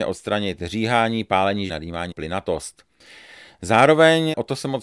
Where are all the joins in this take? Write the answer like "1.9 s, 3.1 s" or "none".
1.7 s, 2.1 s